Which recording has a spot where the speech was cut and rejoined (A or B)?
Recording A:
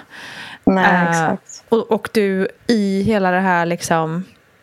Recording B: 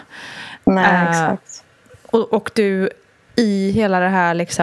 A